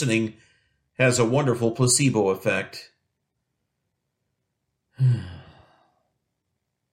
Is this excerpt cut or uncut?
uncut